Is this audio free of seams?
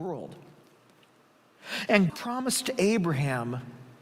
no; 1 cut; at 2.1 s

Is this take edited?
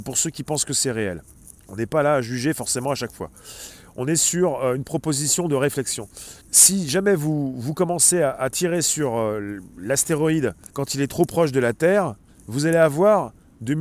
yes; 4 cuts; at 1.6 s, 6.4 s, 10.7 s, 12.3 s

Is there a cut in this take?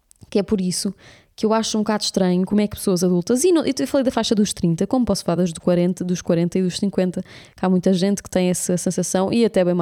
no; 0 cuts

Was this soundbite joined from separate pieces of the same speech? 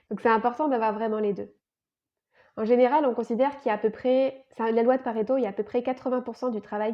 no; 0 cuts

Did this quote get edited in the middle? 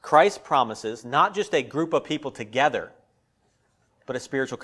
no; 0 cuts

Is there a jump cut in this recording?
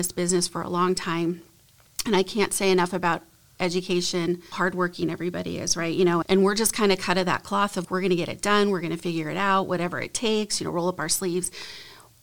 yes; 3 cuts; at 4.5 s, 6.2 s, 7.8 s

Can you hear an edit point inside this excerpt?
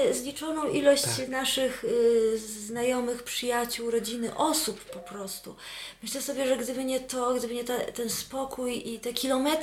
no; 0 cuts

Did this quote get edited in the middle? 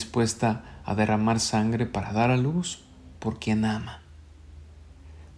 no; 0 cuts

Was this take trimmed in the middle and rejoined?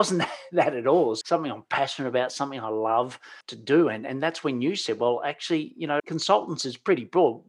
yes; 3 cuts; at 1.2 s, 3.4 s, 6.0 s

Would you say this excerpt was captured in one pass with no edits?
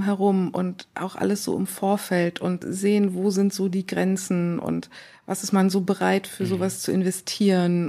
no; 1 cut; at 2.6 s

